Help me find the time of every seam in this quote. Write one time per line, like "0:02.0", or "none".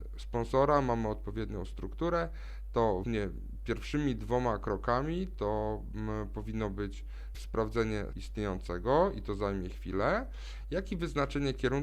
0:03.0
0:07.3
0:08.1